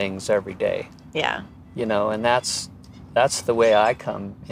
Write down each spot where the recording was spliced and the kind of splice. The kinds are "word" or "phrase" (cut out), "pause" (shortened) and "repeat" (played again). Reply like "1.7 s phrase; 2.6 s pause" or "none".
1.6 s pause

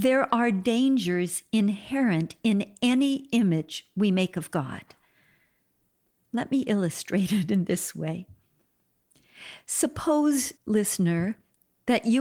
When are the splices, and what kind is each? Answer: 10.6 s pause

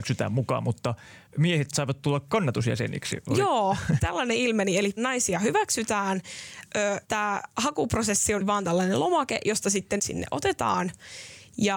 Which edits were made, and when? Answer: 1.3 s pause; 4.0 s phrase; 5.0 s word; 7.0 s pause; 8.4 s word; 10.0 s phrase

